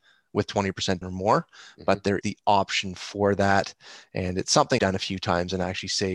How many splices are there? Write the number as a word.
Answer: three